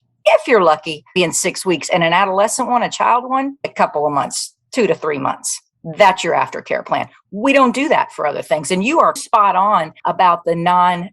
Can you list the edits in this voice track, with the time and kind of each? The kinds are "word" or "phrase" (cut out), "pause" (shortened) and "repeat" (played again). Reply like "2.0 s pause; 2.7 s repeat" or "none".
1.2 s word; 3.6 s word; 9.2 s word; 10.0 s pause